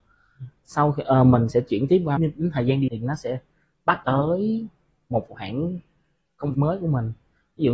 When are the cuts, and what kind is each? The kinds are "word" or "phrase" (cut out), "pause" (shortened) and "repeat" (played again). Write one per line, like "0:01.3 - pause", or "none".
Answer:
0:02.2 - word
0:02.9 - word
0:04.0 - word
0:05.3 - word
0:06.5 - word